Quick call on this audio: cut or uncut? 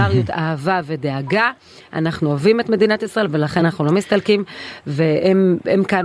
uncut